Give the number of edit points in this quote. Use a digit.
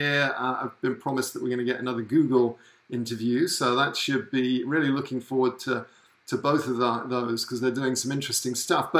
0